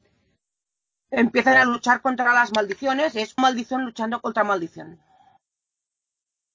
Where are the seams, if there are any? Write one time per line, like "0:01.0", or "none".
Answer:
0:03.4
0:04.2